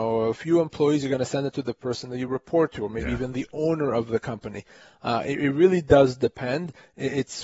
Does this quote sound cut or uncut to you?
uncut